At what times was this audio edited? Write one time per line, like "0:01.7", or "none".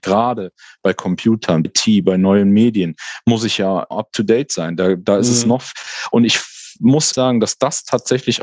0:01.6
0:03.9
0:07.1